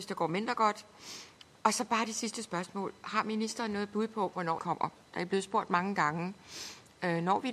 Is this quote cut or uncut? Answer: cut